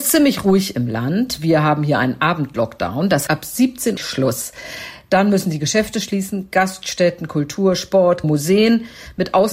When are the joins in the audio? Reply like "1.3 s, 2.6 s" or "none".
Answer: 3.3 s, 4.0 s, 8.2 s